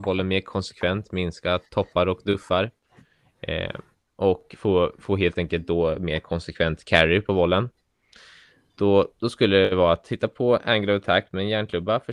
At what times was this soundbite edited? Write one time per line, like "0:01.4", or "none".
none